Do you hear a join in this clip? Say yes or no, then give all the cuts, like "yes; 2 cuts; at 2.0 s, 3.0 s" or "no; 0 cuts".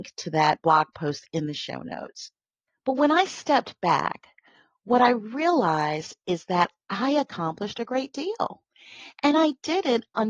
no; 0 cuts